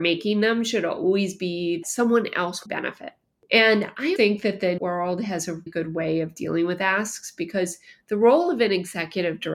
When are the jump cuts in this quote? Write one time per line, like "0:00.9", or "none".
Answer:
0:01.8
0:02.7
0:04.2
0:04.8
0:05.7